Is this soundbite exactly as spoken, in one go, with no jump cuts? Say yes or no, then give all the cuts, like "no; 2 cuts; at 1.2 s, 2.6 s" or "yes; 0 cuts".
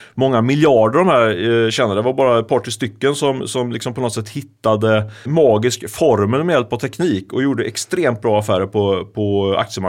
no; 1 cut; at 5.3 s